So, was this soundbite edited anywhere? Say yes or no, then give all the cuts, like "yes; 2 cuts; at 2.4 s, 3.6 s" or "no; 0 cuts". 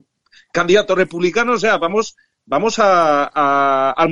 no; 0 cuts